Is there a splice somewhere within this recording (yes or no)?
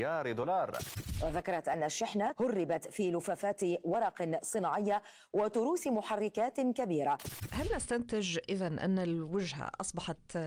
no